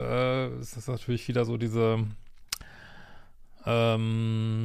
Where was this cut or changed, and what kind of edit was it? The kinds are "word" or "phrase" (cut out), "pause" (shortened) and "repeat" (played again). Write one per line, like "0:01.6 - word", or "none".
none

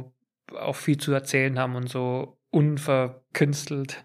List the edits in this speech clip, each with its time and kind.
none

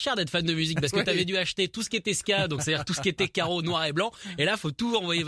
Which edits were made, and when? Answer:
none

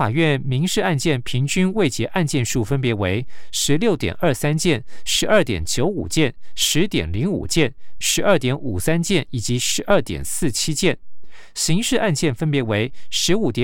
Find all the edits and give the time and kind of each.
0:08.0 - phrase

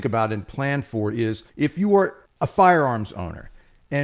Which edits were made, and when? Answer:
0:01.5 - pause
0:02.3 - pause

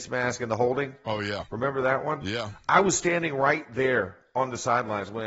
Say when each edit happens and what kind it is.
none

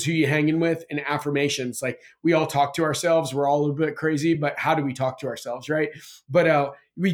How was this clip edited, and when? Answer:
none

